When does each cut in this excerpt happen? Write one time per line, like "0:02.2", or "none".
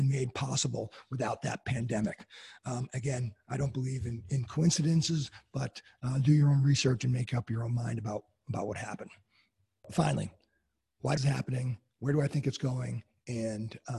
0:11.2